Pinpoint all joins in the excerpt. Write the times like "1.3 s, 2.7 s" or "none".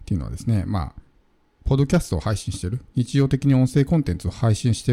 none